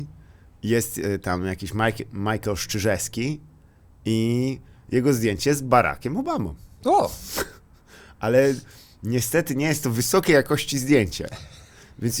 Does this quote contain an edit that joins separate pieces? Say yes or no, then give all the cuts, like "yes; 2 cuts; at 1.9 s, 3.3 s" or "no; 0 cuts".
no; 0 cuts